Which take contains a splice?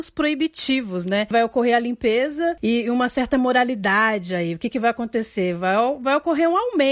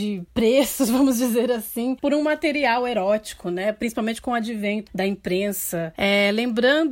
second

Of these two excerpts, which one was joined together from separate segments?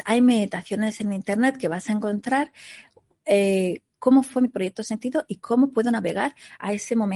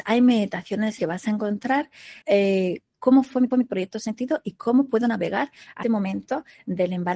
second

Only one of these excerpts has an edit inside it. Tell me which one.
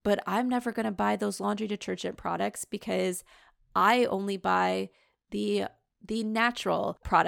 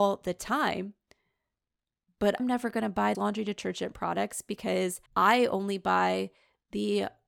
second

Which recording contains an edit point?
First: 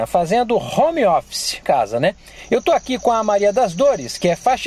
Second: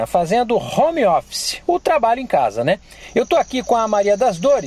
first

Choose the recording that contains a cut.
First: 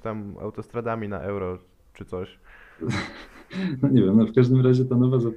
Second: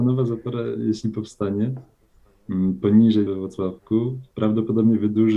second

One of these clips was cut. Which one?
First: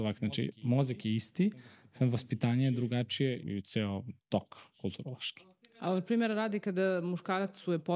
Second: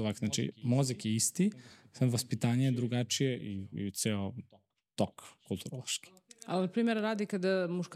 first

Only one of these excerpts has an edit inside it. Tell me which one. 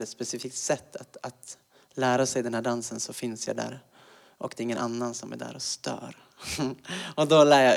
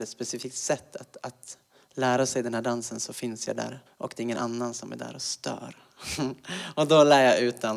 second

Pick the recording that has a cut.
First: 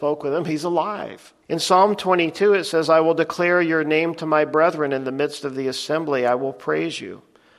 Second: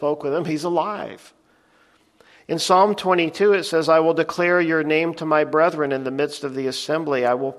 first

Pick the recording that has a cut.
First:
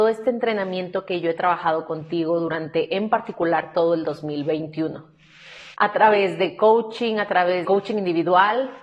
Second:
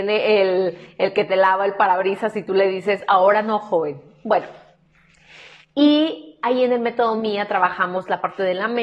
first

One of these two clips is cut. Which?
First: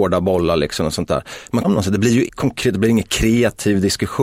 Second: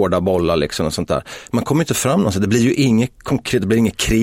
first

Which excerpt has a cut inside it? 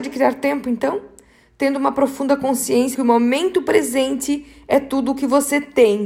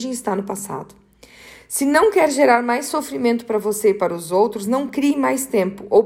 first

